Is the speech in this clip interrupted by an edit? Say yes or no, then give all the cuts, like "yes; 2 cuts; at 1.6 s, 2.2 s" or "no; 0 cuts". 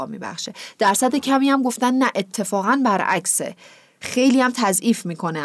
no; 0 cuts